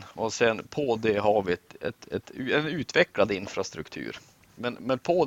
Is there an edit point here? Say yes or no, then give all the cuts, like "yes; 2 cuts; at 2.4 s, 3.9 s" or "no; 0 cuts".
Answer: no; 0 cuts